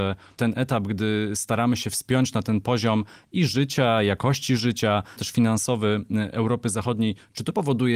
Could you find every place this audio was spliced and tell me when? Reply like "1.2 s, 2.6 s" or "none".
5.2 s